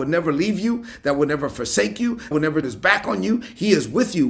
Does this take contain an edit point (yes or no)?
yes